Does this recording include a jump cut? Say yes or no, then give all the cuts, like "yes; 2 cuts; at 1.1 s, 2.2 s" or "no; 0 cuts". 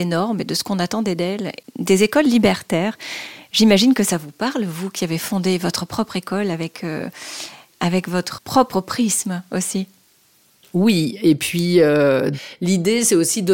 yes; 1 cut; at 8.4 s